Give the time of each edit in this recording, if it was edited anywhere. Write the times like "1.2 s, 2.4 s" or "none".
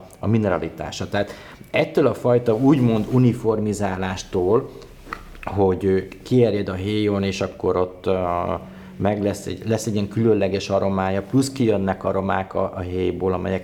none